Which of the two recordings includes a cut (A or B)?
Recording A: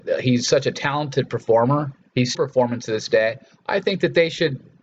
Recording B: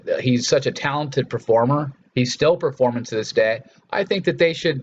A